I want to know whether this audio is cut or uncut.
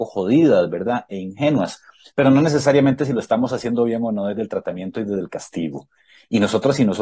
uncut